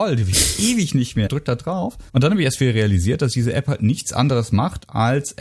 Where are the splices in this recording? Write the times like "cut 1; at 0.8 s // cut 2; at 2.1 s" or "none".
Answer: cut 1; at 1.3 s // cut 2; at 2.1 s